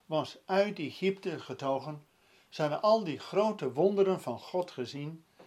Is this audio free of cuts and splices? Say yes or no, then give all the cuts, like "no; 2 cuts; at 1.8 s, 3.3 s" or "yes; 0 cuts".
yes; 0 cuts